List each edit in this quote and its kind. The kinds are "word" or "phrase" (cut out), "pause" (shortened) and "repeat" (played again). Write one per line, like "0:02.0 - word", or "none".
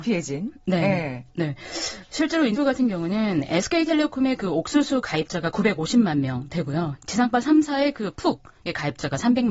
0:02.6 - word